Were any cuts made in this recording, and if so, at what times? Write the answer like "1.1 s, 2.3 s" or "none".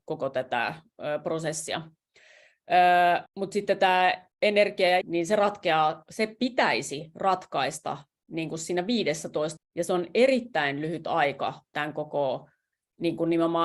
3.3 s, 4.3 s, 5.0 s, 8.2 s, 9.6 s